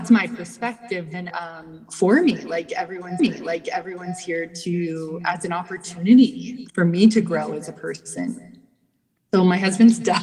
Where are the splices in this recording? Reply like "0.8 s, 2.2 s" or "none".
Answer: 1.3 s, 3.2 s, 6.7 s